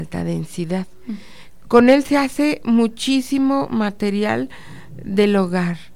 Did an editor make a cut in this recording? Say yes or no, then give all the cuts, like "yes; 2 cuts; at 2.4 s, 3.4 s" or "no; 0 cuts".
no; 0 cuts